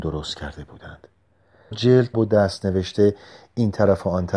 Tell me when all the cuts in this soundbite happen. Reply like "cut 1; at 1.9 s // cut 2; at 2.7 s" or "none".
cut 1; at 1.7 s // cut 2; at 2.1 s